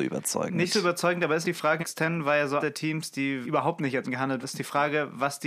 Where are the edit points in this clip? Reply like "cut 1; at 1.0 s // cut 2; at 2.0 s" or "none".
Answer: cut 1; at 1.4 s // cut 2; at 1.8 s // cut 3; at 2.6 s // cut 4; at 3.4 s // cut 5; at 4.0 s // cut 6; at 4.4 s